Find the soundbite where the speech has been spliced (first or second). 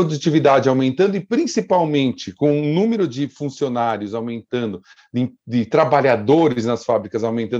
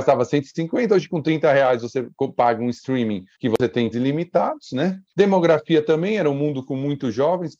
second